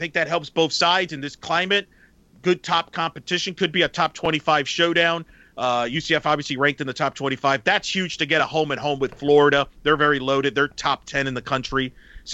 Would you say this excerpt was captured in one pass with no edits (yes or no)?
yes